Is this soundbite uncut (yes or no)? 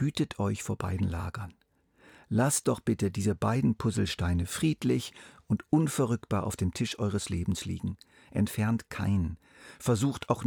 yes